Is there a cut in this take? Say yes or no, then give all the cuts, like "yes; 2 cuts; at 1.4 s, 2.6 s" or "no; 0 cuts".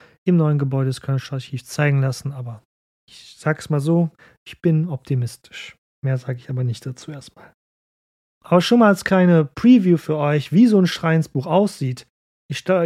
no; 0 cuts